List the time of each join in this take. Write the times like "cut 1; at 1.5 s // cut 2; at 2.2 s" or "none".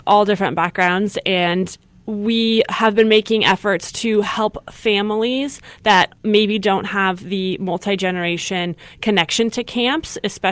none